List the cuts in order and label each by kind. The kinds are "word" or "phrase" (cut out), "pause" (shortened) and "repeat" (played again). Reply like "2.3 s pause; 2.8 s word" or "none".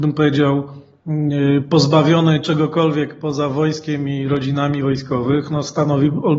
none

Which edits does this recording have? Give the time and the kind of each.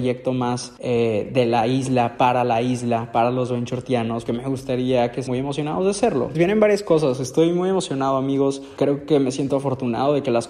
4.3 s word; 5.3 s word; 6.3 s word

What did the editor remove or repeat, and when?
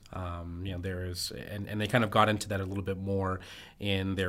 none

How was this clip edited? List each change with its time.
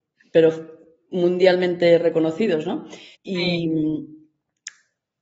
3.1 s pause

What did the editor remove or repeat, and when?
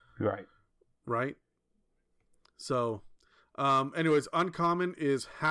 none

